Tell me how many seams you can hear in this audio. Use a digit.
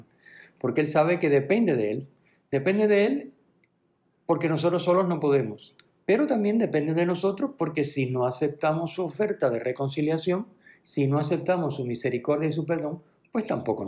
0